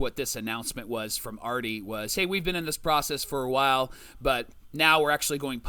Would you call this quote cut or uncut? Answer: uncut